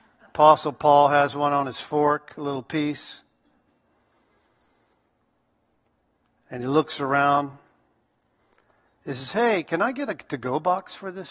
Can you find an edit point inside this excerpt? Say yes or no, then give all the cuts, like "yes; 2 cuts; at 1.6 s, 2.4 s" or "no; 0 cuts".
no; 0 cuts